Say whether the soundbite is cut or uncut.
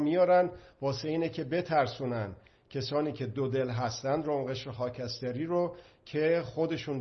uncut